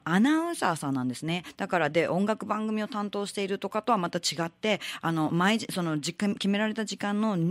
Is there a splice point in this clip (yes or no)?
yes